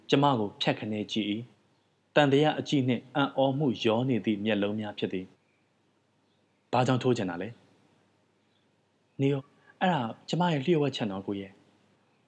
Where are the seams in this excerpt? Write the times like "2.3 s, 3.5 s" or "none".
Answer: 1.5 s, 5.3 s, 9.4 s, 10.2 s